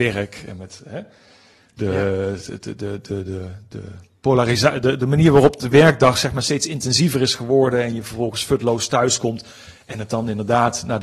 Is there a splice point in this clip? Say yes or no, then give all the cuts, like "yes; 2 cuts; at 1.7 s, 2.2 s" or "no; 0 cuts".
no; 0 cuts